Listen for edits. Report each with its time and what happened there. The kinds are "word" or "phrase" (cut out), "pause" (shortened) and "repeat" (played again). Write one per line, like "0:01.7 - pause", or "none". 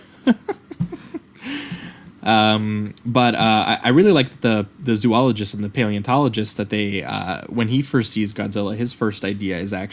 none